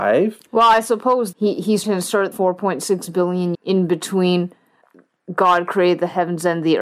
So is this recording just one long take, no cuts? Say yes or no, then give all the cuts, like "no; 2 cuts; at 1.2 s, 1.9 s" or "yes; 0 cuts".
no; 4 cuts; at 1.3 s, 1.8 s, 2.3 s, 3.5 s